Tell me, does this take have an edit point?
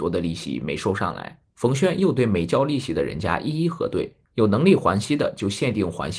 yes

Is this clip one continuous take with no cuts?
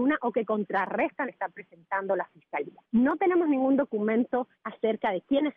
no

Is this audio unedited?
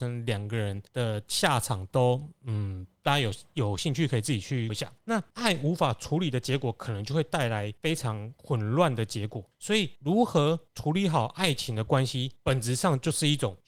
no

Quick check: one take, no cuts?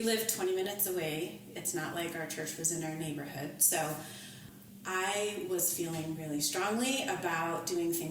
yes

